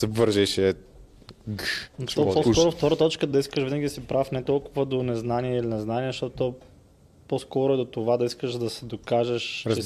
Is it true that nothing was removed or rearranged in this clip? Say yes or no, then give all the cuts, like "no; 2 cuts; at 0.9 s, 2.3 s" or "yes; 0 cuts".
yes; 0 cuts